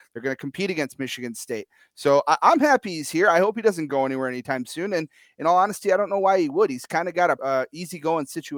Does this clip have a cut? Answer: yes; 1 cut; at 7.4 s

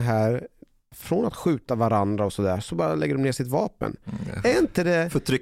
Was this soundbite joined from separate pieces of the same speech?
yes; 1 cut; at 0.9 s

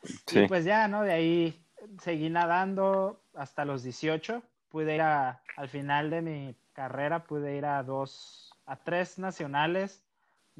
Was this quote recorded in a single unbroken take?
no; 2 cuts; at 5.0 s, 5.5 s

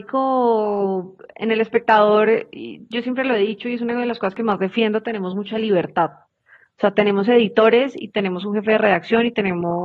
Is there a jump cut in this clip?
no; 0 cuts

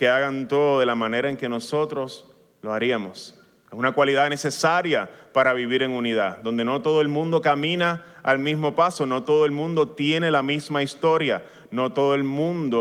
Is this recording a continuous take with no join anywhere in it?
yes; 0 cuts

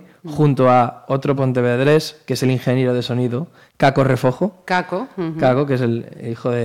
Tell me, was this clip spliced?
no; 0 cuts

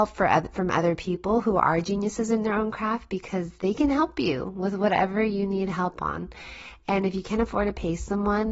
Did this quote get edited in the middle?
no; 0 cuts

